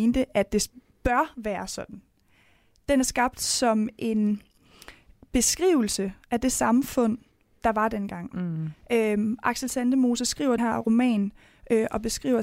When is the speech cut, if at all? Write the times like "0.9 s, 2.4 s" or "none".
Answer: 10.6 s